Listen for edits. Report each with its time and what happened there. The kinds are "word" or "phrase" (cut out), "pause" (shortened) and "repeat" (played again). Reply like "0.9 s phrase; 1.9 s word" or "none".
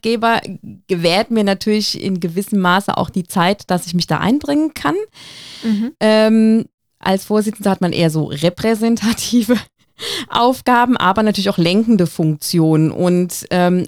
none